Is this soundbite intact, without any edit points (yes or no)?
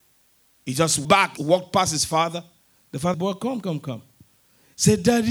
no